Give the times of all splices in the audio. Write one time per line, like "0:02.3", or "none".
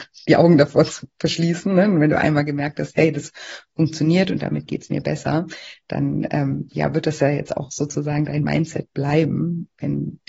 none